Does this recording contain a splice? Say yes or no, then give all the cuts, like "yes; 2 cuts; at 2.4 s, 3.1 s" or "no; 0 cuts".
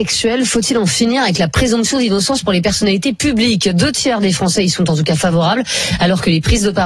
no; 0 cuts